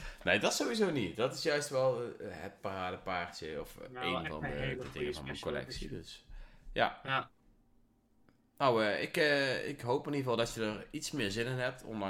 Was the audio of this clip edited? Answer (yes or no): no